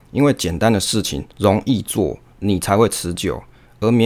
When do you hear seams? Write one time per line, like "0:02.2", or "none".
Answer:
0:01.3